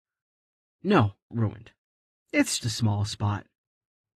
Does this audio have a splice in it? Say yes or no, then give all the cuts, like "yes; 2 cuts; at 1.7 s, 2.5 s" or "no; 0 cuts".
yes; 2 cuts; at 1.3 s, 2.6 s